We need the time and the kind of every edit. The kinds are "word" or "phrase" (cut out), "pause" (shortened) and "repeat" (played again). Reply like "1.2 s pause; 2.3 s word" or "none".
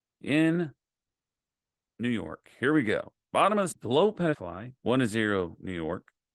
3.7 s phrase; 4.3 s word; 4.8 s pause